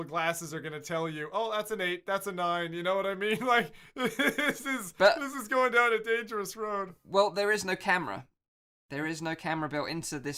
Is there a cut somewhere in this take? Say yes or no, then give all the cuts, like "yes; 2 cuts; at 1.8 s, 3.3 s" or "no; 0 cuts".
no; 0 cuts